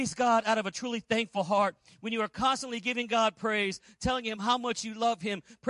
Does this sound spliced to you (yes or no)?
no